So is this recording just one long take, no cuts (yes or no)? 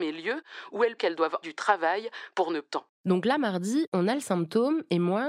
no